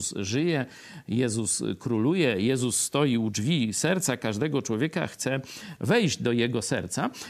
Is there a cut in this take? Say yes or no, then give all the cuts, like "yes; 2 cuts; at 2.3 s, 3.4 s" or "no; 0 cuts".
no; 0 cuts